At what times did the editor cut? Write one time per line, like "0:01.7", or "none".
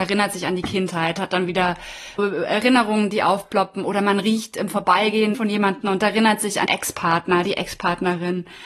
0:02.2
0:05.3
0:06.7